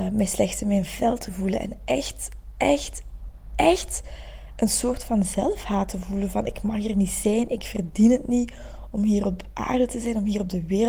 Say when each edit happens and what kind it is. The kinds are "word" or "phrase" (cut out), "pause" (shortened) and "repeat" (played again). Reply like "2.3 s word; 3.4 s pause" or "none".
none

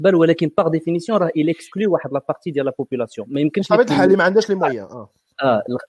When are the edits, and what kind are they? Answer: none

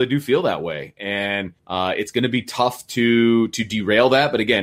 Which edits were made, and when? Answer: 1.6 s pause

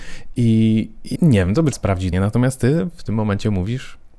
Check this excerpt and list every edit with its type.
1.2 s word; 1.7 s word; 2.1 s word

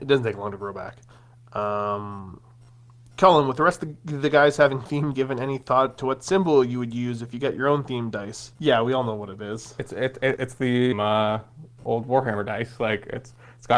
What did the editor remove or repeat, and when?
1.1 s pause; 5.1 s phrase; 8.6 s pause; 10.4 s word; 10.9 s phrase

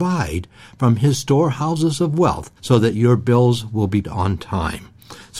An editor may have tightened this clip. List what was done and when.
2.6 s pause; 4.0 s word

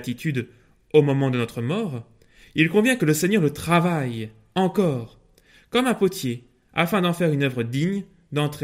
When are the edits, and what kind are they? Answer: none

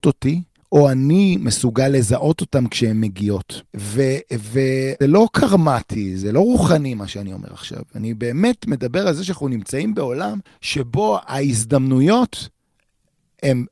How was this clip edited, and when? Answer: 3.7 s pause; 5.0 s word; 10.5 s pause

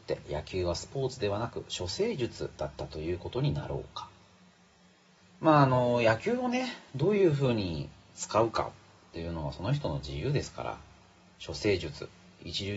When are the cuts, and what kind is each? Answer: none

